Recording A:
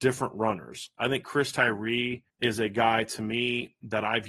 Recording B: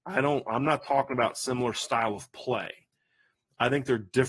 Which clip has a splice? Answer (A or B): A